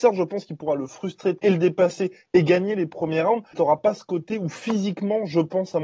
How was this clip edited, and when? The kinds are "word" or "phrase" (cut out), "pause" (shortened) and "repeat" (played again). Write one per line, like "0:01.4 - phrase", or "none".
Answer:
0:01.4 - word
0:03.5 - word